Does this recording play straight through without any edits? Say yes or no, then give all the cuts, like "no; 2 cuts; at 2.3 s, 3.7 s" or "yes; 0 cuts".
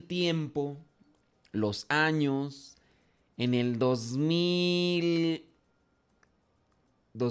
yes; 0 cuts